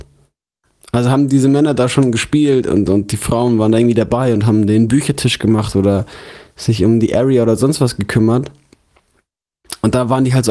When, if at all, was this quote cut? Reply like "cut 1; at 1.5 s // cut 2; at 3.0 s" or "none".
none